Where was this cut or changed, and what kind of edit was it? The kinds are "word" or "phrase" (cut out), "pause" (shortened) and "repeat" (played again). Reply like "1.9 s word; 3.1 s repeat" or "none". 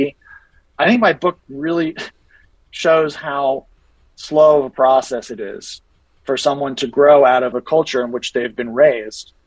none

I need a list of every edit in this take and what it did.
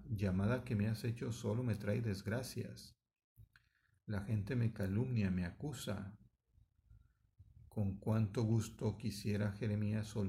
7.7 s pause

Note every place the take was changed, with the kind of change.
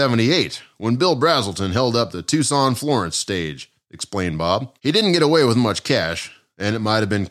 4.8 s pause

